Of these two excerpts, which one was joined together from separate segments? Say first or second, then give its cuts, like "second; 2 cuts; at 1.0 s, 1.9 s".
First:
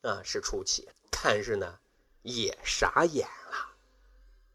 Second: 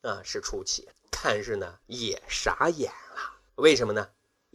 second; 2 cuts; at 1.8 s, 3.5 s